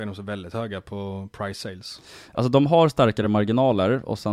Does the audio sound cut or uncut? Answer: uncut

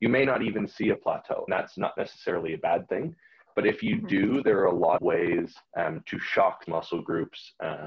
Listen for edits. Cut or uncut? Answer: cut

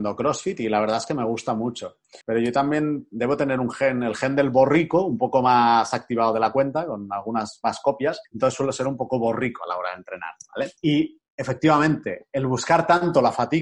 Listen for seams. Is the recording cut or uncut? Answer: cut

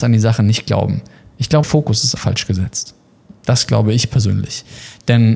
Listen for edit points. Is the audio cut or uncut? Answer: cut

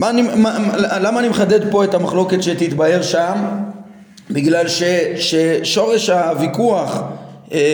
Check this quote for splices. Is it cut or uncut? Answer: uncut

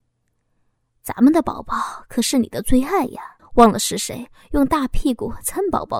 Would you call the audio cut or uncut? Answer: cut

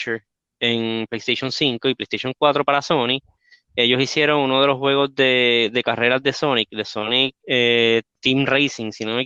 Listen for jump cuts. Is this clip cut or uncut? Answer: uncut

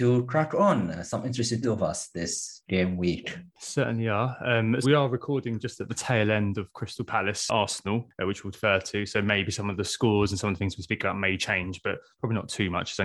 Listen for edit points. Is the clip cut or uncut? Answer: cut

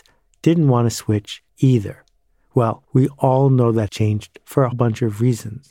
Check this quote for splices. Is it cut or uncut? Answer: cut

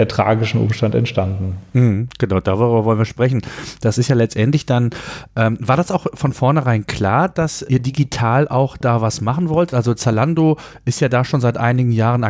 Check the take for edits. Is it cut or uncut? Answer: cut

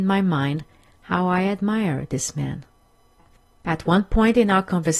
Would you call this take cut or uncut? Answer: uncut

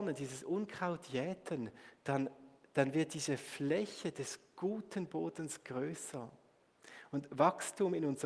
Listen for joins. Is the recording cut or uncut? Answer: uncut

